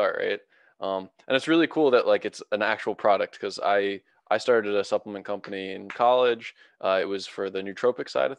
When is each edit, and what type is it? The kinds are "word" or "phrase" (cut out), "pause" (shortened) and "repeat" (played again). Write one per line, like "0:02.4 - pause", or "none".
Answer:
none